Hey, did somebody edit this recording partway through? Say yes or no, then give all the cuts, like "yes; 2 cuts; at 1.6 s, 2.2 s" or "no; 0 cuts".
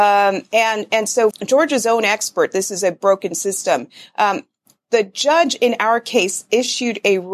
yes; 1 cut; at 1.3 s